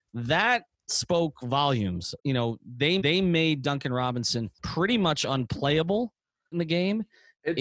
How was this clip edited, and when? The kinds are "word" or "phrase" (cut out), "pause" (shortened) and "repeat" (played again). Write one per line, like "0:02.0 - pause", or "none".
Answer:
0:02.2 - word
0:03.0 - repeat
0:04.5 - pause
0:06.5 - word